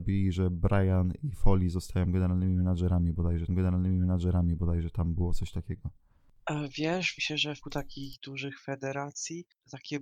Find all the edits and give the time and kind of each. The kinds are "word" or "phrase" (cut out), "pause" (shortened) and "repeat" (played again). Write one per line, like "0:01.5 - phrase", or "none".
0:03.5 - repeat
0:07.2 - phrase
0:07.6 - word